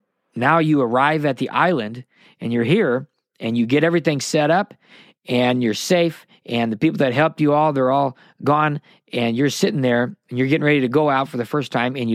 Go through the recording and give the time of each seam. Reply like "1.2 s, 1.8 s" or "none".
none